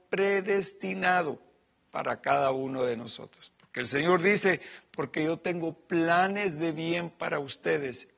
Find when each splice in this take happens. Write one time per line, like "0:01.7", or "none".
none